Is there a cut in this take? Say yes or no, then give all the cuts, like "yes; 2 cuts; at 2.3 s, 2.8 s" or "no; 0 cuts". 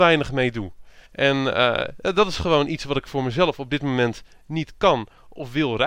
yes; 1 cut; at 1.1 s